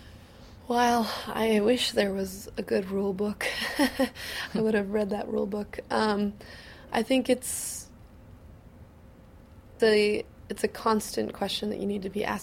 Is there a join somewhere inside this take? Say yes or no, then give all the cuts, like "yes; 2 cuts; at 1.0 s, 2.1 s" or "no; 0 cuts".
yes; 1 cut; at 9.8 s